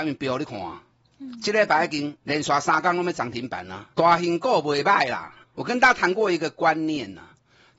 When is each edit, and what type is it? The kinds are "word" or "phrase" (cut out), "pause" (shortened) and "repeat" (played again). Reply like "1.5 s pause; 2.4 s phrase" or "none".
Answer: 2.2 s pause; 3.9 s pause; 5.4 s pause